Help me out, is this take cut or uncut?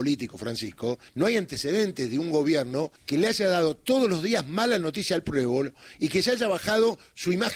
cut